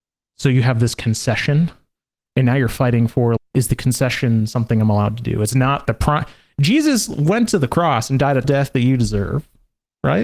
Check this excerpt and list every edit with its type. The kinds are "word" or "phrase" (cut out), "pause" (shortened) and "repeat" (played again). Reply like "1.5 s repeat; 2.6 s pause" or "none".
3.4 s word; 5.8 s word; 8.4 s word